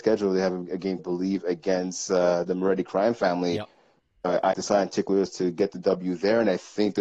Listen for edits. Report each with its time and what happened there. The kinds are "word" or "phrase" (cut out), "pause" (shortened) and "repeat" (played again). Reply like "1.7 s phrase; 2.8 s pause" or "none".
1.0 s phrase; 4.5 s word